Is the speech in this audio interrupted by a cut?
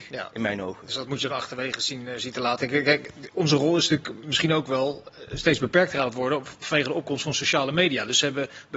no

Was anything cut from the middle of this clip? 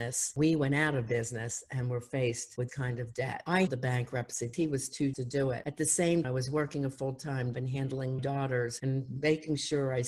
yes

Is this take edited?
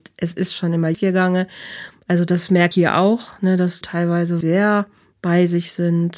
yes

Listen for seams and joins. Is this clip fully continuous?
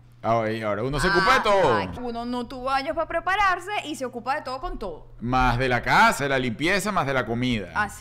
no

